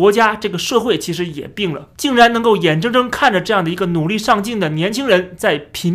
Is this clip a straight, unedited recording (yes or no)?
no